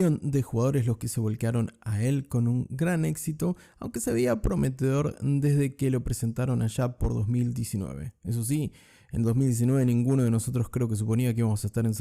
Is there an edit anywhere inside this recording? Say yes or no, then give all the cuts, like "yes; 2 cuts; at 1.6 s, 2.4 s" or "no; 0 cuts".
no; 0 cuts